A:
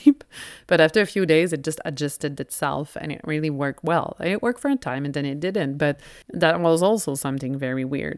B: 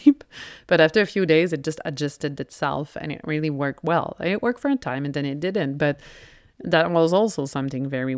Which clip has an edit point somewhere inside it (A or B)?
A